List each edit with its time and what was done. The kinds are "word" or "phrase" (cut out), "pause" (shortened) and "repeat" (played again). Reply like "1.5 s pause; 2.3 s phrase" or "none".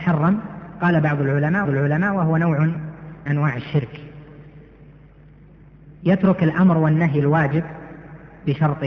1.6 s repeat; 3.3 s word; 6.0 s pause

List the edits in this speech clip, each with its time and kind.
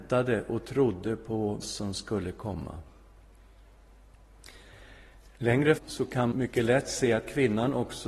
1.6 s word; 5.8 s word; 6.3 s word

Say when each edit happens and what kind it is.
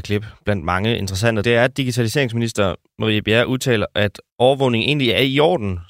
1.4 s word; 4.3 s pause

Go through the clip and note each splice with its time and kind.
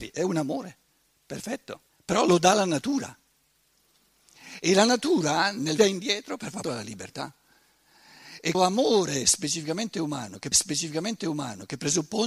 1.9 s pause; 5.8 s phrase; 6.6 s word; 8.5 s word; 10.5 s repeat

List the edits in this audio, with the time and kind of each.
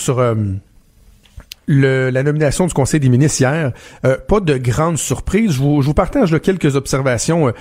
none

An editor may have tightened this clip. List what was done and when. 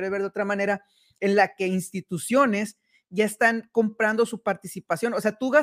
none

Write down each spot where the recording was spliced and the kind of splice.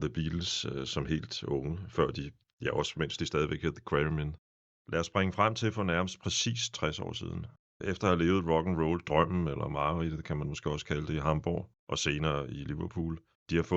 none

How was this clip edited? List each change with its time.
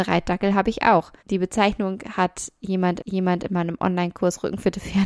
1.2 s pause; 3.0 s repeat

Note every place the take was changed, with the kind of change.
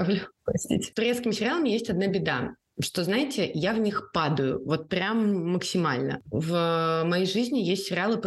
none

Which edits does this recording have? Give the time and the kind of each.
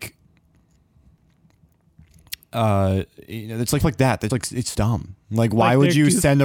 3.8 s word; 4.3 s word; 4.7 s word

